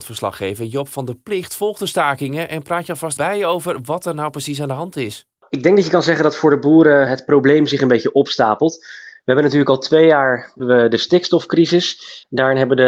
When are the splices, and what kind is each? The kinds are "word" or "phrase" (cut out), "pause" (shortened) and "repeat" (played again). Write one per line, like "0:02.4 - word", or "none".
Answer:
0:03.2 - word
0:07.1 - word
0:10.6 - word